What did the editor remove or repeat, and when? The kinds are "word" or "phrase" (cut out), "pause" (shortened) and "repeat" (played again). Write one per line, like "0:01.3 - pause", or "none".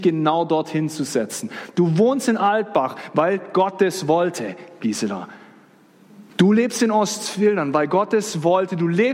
0:06.3 - pause

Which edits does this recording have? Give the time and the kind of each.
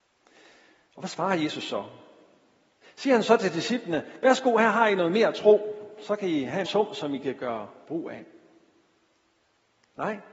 0:06.7 - word

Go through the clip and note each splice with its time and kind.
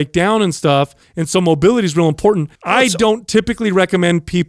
0:01.0 - pause
0:02.6 - pause

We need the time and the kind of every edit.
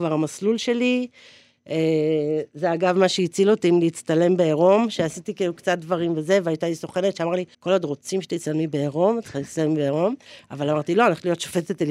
0:07.5 - pause

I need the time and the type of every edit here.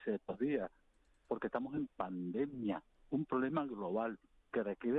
0:01.9 - word

